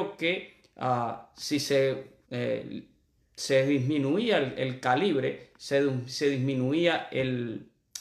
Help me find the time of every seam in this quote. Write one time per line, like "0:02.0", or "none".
0:02.2